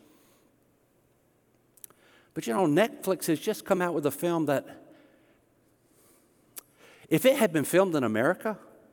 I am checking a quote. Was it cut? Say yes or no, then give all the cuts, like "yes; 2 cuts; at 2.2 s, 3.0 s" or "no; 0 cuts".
no; 0 cuts